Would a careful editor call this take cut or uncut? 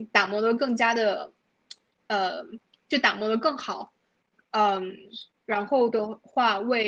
uncut